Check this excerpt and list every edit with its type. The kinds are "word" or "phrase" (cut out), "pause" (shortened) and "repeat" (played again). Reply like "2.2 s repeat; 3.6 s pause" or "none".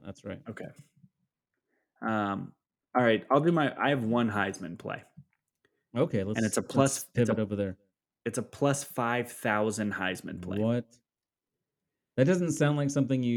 none